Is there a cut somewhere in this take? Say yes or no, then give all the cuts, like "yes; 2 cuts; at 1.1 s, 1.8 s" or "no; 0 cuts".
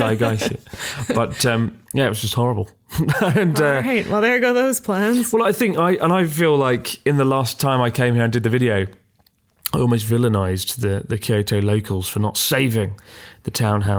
yes; 1 cut; at 1.8 s